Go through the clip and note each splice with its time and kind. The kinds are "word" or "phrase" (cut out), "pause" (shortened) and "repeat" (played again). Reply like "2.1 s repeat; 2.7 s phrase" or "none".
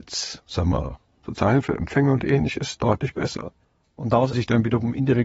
3.6 s pause; 4.3 s word